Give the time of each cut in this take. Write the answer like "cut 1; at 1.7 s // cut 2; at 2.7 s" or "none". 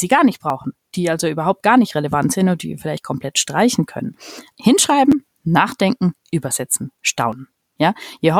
cut 1; at 4.5 s